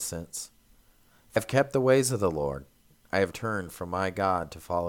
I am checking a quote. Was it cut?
yes; 2 cuts; at 1.4 s, 3.3 s

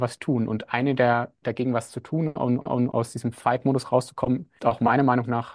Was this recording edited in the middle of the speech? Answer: yes; 3 cuts; at 1.4 s, 2.6 s, 4.6 s

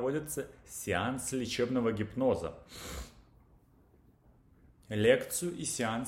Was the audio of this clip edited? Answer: no; 0 cuts

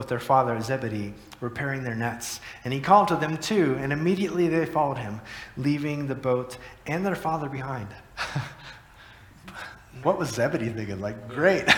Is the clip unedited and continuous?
no; 1 cut; at 10.0 s

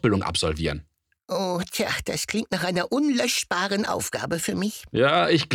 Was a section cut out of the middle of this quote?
no; 0 cuts

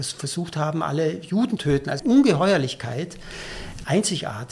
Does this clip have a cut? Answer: yes; 2 cuts; at 1.6 s, 2.0 s

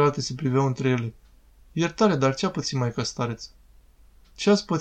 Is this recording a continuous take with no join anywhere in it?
yes; 0 cuts

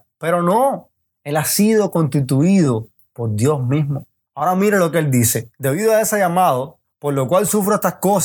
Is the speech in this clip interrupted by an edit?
no; 0 cuts

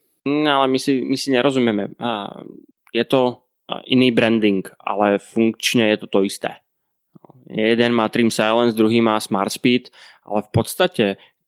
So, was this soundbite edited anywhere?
no; 0 cuts

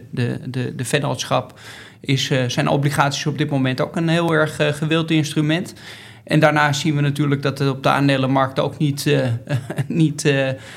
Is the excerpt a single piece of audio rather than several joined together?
yes; 0 cuts

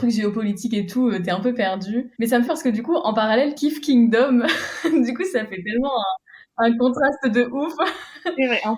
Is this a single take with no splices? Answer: no; 4 cuts; at 2.1 s, 2.5 s, 3.6 s, 6.5 s

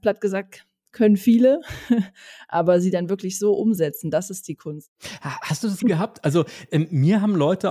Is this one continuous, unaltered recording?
no; 1 cut; at 5.8 s

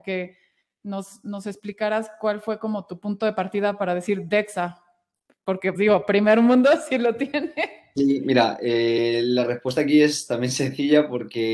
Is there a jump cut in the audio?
yes; 1 cut; at 5.7 s

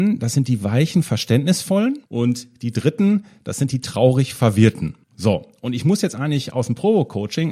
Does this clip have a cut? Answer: yes; 2 cuts; at 2.1 s, 5.0 s

